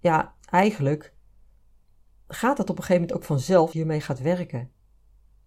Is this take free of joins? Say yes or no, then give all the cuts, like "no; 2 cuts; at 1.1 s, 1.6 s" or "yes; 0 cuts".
no; 1 cut; at 3.7 s